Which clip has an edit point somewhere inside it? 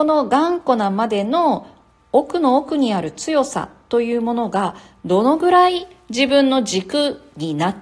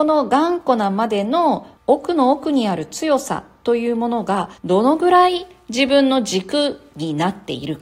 second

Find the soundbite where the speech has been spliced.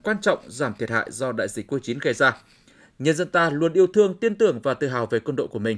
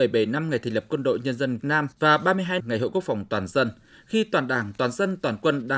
second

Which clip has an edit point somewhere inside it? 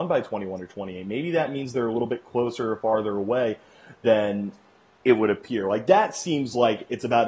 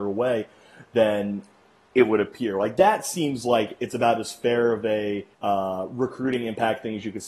second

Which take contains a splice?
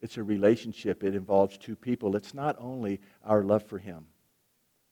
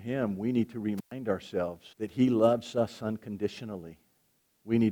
second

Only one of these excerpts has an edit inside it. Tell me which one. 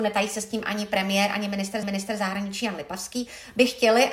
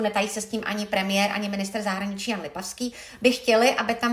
first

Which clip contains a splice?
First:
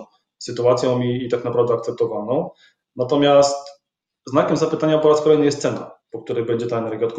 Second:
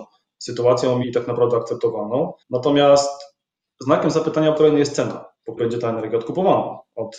second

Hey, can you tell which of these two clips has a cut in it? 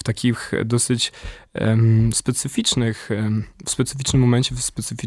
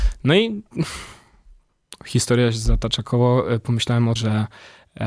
second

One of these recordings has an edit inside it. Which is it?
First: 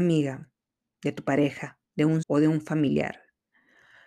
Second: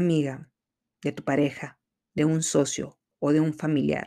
first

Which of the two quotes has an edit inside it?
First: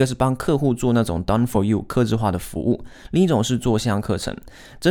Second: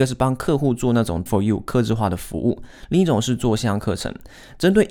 second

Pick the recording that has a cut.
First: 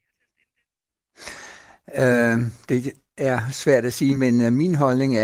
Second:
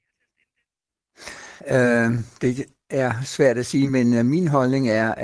second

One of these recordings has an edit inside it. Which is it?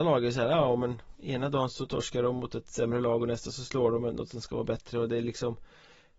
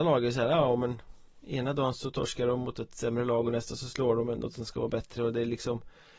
first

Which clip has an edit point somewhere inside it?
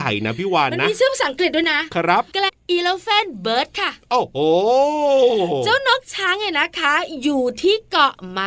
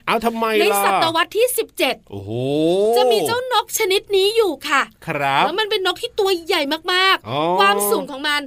first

